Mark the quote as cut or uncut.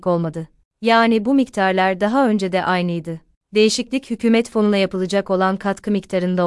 uncut